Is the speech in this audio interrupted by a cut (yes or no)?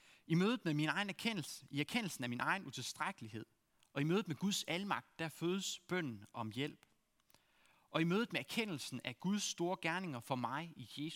no